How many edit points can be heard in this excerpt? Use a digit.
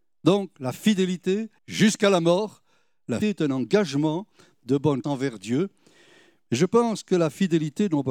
3